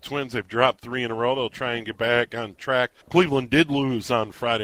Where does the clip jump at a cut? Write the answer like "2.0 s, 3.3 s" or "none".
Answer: 3.0 s